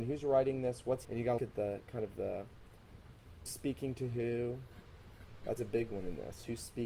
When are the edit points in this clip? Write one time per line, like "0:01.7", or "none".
0:01.0
0:01.4
0:03.5
0:05.6

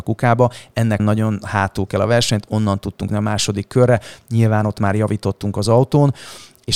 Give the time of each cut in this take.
0:01.0
0:01.9
0:03.1

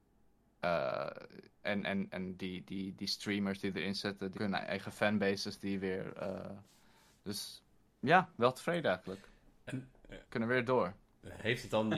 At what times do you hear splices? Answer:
0:01.6
0:04.3
0:10.2

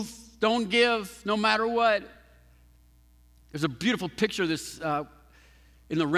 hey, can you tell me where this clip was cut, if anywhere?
none

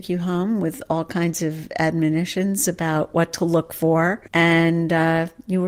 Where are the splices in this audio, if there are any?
0:04.3

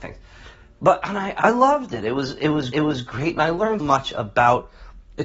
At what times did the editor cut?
0:01.4
0:02.7
0:03.8

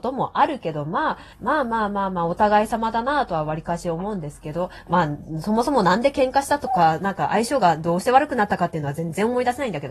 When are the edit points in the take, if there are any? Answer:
0:01.3

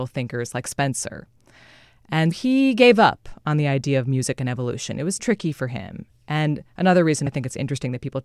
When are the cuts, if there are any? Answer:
0:02.3
0:05.2
0:07.3

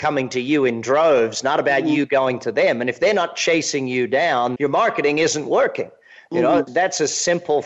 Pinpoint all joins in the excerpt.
0:04.6
0:06.7

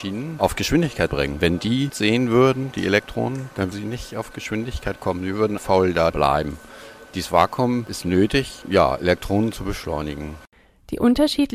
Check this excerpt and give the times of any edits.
0:01.1
0:01.9
0:03.7
0:05.6
0:06.1
0:08.6

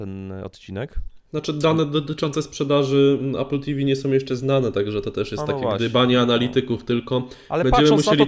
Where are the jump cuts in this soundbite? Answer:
0:01.3

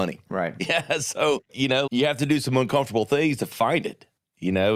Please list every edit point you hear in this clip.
0:01.5
0:01.9

